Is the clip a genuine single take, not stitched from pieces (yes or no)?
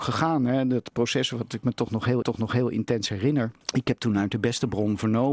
no